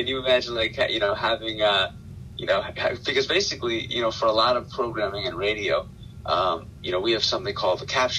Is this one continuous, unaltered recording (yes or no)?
yes